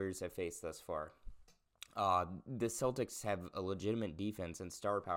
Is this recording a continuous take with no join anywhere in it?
yes; 0 cuts

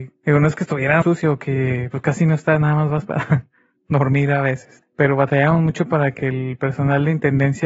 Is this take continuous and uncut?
no; 1 cut; at 1.0 s

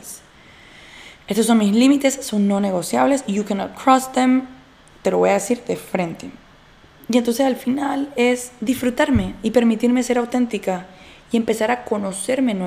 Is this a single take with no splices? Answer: yes; 0 cuts

